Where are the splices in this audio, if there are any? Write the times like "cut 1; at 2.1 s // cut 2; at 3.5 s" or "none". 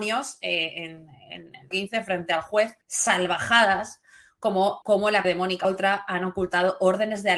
cut 1; at 1.7 s // cut 2; at 2.8 s // cut 3; at 4.8 s // cut 4; at 5.2 s // cut 5; at 5.6 s